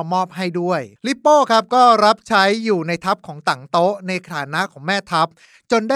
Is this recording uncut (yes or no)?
no